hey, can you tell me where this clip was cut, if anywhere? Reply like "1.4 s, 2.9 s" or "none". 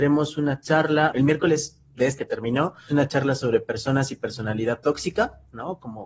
1.1 s, 2.2 s, 2.9 s